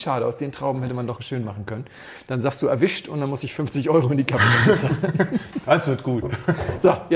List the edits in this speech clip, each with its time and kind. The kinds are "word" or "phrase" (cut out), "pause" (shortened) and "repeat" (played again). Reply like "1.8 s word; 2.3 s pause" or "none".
1.4 s word